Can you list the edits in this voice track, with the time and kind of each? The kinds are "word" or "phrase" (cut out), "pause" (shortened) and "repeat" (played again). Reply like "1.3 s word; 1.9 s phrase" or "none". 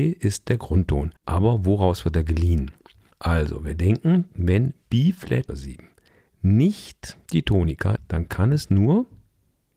1.2 s pause; 5.5 s word; 7.2 s pause; 8.0 s word

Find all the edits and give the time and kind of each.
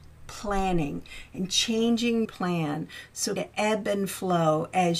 2.2 s word; 3.4 s word

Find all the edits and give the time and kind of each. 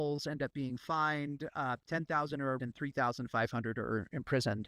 2.6 s word

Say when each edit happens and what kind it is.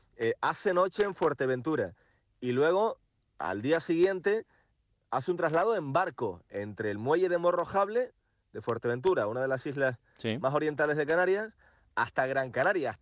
none

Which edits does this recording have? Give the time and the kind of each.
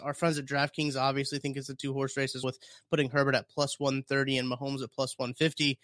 2.4 s word

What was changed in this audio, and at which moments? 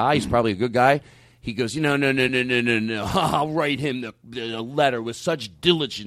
none

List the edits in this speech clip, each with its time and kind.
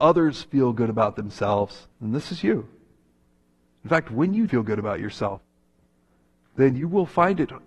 1.9 s pause; 4.5 s word

